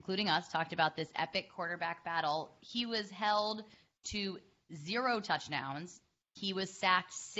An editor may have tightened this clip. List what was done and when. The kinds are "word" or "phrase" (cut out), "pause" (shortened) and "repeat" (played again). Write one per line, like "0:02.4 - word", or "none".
none